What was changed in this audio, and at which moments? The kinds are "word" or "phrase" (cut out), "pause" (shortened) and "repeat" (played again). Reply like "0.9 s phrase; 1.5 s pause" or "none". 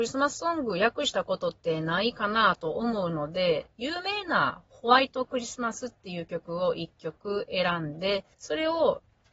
8.3 s pause